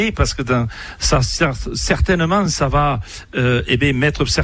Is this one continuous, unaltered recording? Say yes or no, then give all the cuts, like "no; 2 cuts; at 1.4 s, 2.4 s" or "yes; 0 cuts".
yes; 0 cuts